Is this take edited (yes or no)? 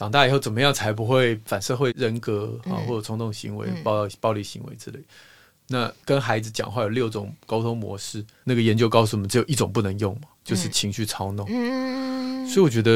no